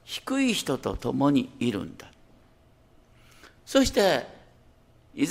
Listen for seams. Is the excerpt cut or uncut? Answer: uncut